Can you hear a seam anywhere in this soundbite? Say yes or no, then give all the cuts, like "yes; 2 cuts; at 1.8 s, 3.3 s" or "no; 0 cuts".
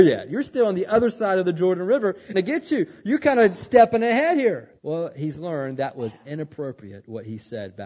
yes; 2 cuts; at 2.3 s, 4.8 s